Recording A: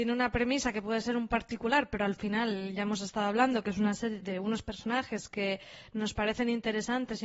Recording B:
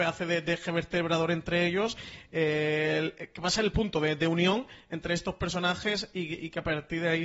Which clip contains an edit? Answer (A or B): A